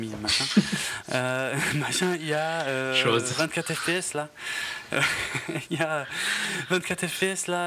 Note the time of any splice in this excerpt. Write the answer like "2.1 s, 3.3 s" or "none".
none